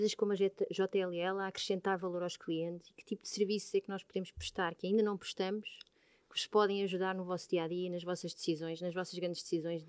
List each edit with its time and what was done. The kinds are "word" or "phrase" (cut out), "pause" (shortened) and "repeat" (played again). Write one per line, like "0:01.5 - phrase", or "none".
none